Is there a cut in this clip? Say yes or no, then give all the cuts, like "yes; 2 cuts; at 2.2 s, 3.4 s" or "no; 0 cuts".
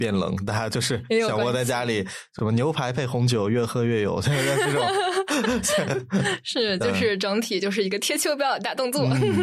no; 0 cuts